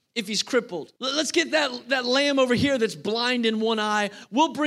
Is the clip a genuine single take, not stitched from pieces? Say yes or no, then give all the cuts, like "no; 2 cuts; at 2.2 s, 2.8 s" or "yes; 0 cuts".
no; 1 cut; at 1.0 s